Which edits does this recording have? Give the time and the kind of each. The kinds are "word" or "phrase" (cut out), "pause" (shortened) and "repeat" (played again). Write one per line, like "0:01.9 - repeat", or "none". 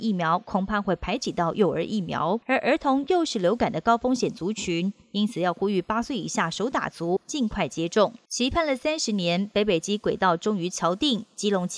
0:02.4 - pause
0:08.3 - pause